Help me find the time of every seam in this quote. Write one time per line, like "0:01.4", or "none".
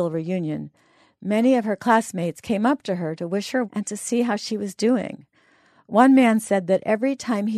0:03.6